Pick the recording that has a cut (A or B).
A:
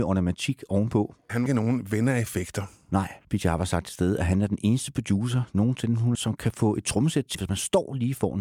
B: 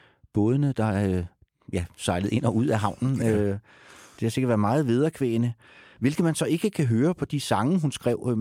A